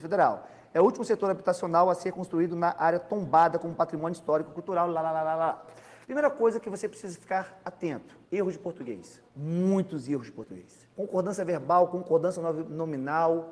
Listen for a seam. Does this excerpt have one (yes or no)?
yes